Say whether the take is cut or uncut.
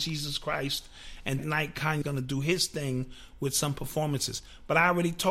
cut